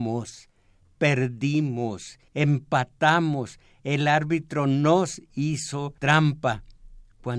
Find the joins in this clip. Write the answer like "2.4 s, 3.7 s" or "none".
2.3 s, 6.0 s